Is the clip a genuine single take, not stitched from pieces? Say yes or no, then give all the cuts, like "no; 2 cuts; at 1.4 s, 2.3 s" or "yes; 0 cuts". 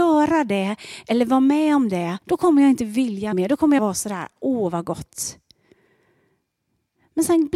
no; 3 cuts; at 2.2 s, 3.3 s, 3.8 s